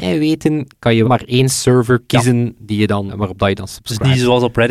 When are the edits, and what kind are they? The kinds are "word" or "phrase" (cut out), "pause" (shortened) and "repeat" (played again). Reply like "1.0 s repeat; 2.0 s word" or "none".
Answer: 1.0 s word; 3.1 s word